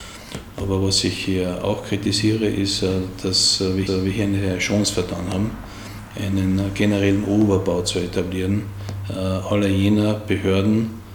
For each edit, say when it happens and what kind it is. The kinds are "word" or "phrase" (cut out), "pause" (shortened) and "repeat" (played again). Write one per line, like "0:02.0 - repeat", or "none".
0:03.9 - repeat